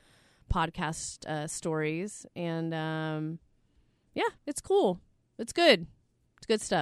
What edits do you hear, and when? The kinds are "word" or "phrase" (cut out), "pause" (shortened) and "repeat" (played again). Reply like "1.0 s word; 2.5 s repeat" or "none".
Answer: 4.4 s pause